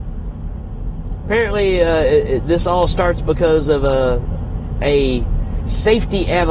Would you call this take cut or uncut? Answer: uncut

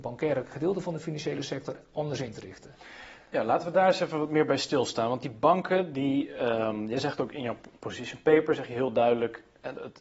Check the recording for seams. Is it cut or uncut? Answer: uncut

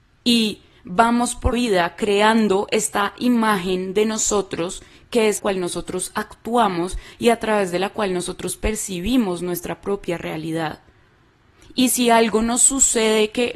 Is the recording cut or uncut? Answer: cut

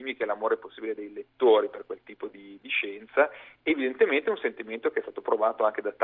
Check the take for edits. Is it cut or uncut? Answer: uncut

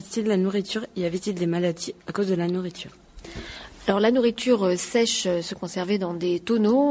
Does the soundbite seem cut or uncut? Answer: cut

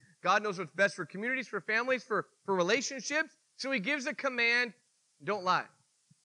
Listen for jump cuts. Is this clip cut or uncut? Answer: uncut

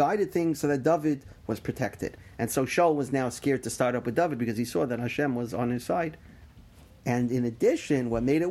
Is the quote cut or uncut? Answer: uncut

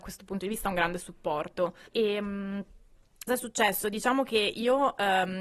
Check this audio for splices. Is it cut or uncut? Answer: cut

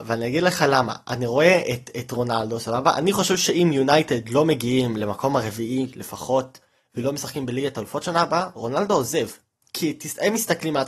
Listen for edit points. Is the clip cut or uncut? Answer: uncut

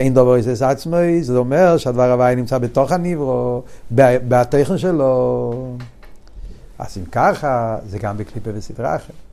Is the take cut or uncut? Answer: uncut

